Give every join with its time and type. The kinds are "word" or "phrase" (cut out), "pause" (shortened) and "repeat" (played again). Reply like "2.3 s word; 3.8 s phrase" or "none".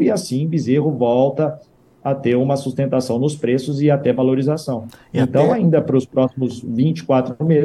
none